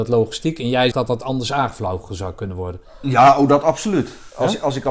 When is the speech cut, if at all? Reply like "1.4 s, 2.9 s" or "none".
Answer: 0.9 s